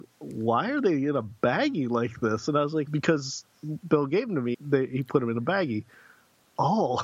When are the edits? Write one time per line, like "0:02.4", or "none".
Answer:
0:02.9
0:04.5